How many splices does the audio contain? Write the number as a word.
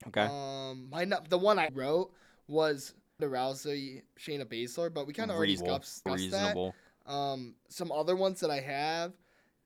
six